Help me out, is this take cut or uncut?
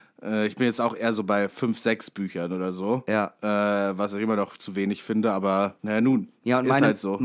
cut